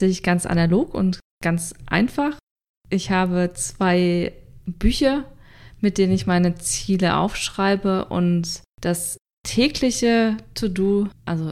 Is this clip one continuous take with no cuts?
no; 1 cut; at 8.7 s

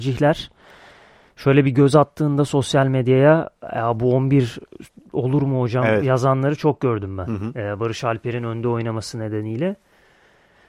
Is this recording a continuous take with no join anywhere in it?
yes; 0 cuts

